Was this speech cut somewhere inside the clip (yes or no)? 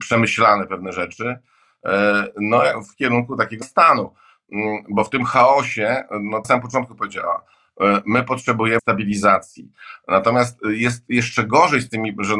yes